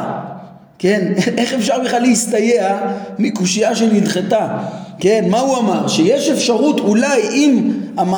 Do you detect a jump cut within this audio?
no; 0 cuts

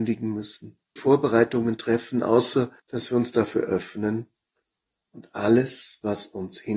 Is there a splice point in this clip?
yes; 2 cuts; at 1.0 s, 2.8 s

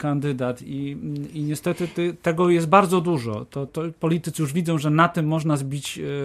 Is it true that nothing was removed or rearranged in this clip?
no; 1 cut; at 3.7 s

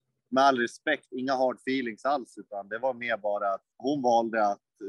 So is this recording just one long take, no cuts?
no; 1 cut; at 3.7 s

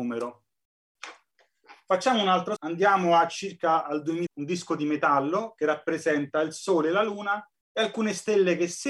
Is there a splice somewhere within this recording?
yes; 3 cuts; at 2.6 s, 4.3 s, 7.5 s

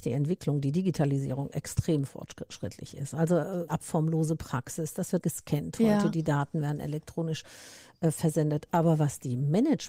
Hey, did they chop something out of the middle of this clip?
yes; 2 cuts; at 3.7 s, 5.2 s

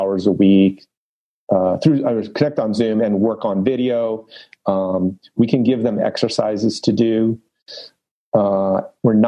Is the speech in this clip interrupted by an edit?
no; 0 cuts

